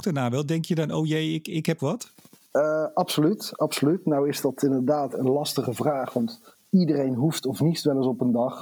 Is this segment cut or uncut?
cut